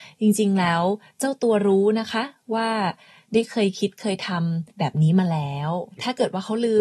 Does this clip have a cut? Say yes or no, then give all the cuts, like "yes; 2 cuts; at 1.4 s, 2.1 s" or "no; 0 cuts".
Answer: yes; 1 cut; at 4.7 s